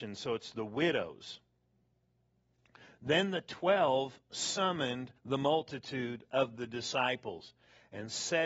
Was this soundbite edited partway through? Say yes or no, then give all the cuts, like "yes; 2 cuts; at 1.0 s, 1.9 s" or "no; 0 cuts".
yes; 1 cut; at 5.2 s